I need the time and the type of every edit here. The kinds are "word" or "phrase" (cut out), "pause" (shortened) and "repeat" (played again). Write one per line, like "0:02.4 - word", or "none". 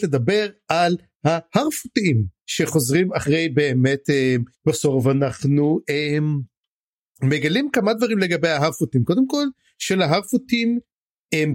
0:04.5 - pause

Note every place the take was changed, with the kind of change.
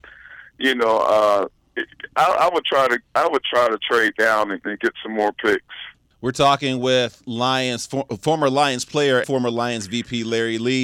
0:06.1 - pause
0:09.2 - word

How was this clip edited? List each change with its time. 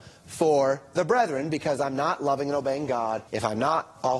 0:03.3 - pause

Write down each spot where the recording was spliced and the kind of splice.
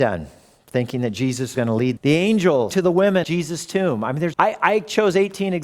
0:01.5 - word
0:02.0 - word
0:02.7 - word
0:03.2 - word
0:04.3 - word

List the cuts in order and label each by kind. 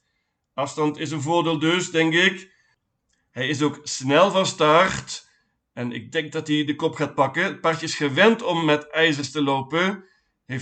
none

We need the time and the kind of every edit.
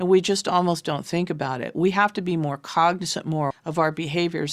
0:03.5 - word

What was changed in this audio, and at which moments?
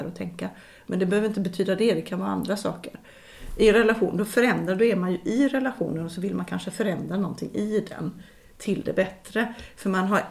none

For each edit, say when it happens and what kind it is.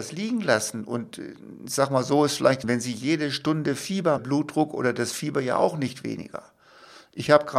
0:02.6 - phrase
0:04.2 - phrase

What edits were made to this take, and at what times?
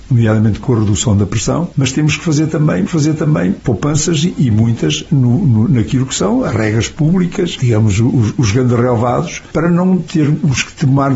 0:02.9 - repeat

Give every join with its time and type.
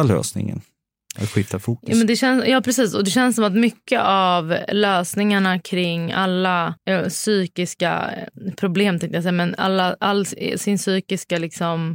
0:06.8 - pause

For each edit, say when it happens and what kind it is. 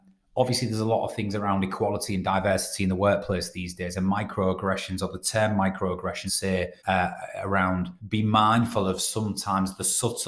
0:06.3 - phrase
0:06.8 - pause
0:08.0 - pause

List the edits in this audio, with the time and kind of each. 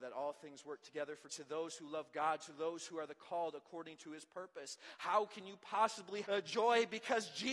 0:01.3 - word
0:06.2 - word

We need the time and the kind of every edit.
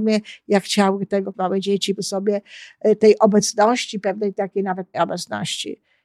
0:01.3 - word
0:02.0 - word
0:04.9 - word

